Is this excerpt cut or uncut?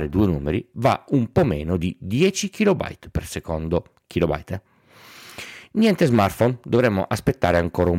uncut